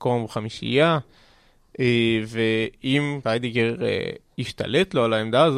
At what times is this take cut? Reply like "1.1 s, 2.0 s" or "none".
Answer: 3.2 s